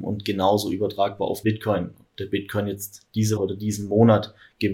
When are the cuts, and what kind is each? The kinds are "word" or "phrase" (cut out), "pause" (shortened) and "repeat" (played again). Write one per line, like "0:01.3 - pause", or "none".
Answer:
0:01.4 - word
0:03.4 - word